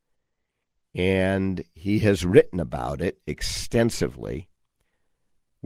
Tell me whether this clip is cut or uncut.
uncut